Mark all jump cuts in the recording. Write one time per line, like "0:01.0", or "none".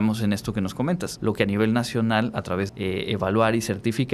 0:01.2
0:02.7